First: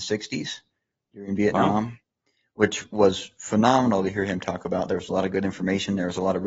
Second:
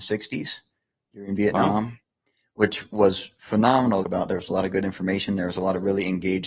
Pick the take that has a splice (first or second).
second